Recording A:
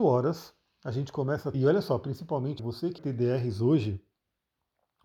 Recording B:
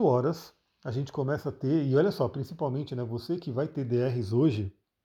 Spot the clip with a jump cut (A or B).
A